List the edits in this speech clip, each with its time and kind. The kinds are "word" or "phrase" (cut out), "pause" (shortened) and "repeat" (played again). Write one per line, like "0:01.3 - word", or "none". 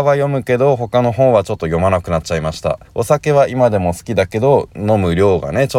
0:02.9 - pause